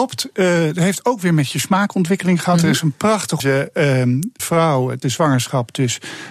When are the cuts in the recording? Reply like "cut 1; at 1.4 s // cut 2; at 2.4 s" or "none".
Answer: cut 1; at 3.4 s // cut 2; at 4.4 s // cut 3; at 5.0 s